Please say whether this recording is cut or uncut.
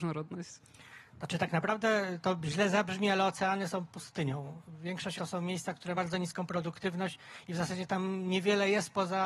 cut